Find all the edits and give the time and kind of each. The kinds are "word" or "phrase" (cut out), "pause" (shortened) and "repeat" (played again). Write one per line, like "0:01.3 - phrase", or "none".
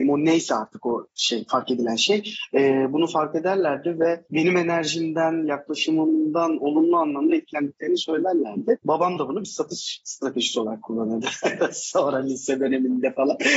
0:01.1 - pause
0:04.2 - pause